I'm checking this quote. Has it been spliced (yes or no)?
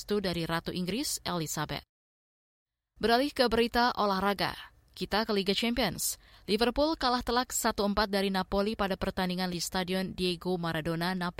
yes